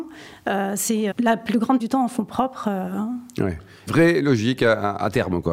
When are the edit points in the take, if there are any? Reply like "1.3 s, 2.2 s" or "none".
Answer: 1.1 s, 1.8 s, 3.9 s